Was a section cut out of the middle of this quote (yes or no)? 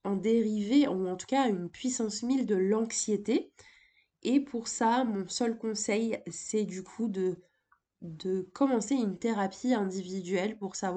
no